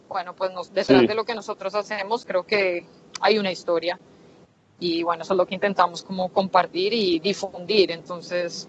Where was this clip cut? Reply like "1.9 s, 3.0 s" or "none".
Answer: none